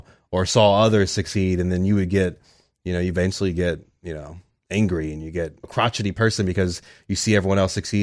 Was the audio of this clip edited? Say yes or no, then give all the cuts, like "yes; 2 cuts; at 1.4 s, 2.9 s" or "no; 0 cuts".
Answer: yes; 1 cut; at 5.6 s